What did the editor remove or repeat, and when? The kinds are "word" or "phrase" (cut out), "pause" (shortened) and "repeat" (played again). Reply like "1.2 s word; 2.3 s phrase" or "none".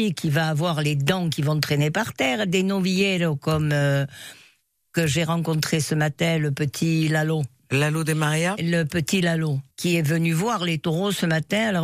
9.7 s pause